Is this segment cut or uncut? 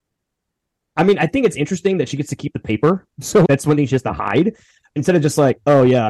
cut